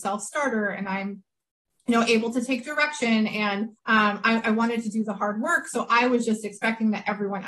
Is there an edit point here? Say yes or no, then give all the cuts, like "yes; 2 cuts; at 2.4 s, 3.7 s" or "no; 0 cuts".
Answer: yes; 1 cut; at 3.8 s